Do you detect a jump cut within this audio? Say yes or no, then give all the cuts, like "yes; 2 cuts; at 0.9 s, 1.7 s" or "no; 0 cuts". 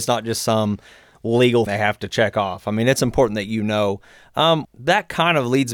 yes; 2 cuts; at 1.7 s, 4.6 s